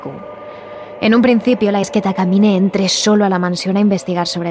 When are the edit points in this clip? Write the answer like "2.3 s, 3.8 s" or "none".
1.8 s